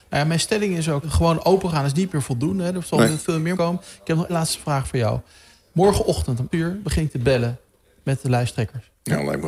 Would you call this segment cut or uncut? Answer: cut